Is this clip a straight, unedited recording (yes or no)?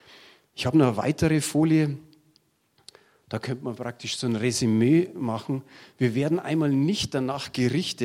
yes